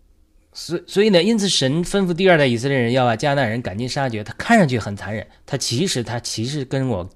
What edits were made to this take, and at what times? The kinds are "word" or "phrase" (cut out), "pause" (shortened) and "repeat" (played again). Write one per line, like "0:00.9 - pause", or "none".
0:05.4 - pause